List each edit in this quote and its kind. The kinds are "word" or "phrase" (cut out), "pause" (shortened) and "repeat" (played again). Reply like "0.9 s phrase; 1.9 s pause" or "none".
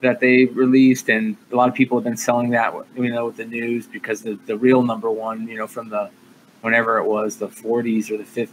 1.4 s pause

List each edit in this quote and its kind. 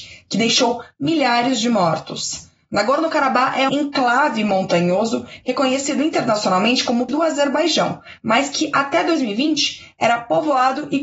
3.7 s word; 7.1 s word

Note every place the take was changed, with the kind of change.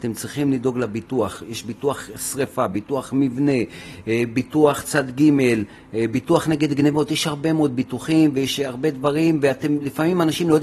none

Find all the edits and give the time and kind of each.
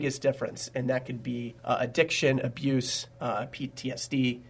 1.6 s pause; 3.1 s pause

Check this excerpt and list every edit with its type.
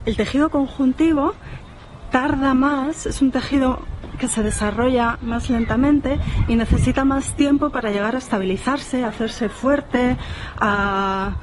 none

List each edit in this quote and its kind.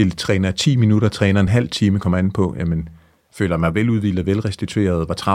none

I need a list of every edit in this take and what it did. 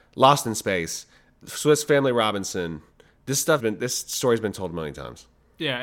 1.4 s word; 3.6 s word

